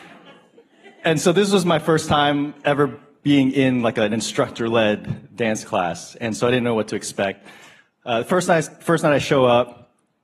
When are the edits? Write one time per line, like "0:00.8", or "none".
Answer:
none